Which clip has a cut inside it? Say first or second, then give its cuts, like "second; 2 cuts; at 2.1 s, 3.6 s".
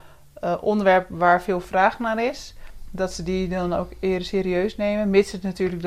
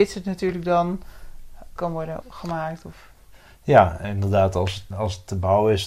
second; 4 cuts; at 1.8 s, 2.2 s, 4.0 s, 4.9 s